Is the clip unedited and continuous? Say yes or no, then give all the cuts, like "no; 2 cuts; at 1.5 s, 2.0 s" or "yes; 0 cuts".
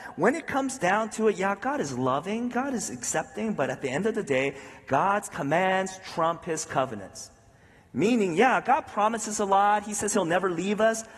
yes; 0 cuts